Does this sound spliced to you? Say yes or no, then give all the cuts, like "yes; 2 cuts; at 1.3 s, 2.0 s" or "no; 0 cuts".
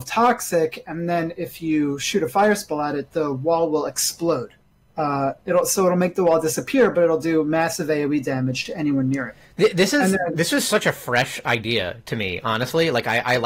no; 0 cuts